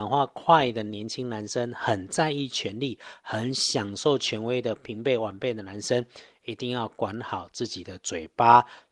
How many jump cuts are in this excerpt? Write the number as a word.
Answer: zero